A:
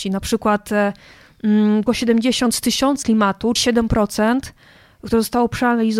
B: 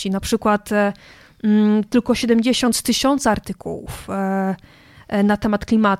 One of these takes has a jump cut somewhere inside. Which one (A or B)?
A